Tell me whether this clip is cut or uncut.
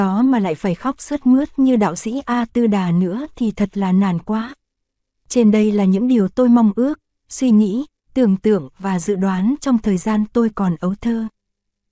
uncut